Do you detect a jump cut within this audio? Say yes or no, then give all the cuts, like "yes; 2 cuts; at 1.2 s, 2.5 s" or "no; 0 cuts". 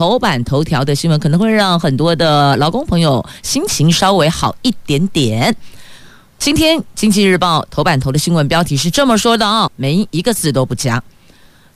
yes; 1 cut; at 9.7 s